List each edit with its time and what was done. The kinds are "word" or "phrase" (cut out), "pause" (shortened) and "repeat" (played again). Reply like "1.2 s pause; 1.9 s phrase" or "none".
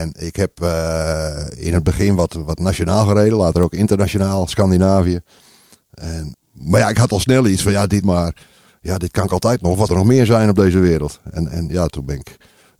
6.3 s word; 8.0 s phrase; 9.9 s word